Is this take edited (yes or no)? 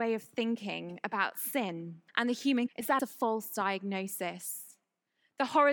yes